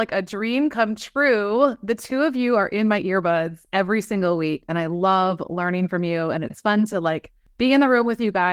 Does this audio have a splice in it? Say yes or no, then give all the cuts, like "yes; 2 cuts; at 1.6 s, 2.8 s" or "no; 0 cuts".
no; 0 cuts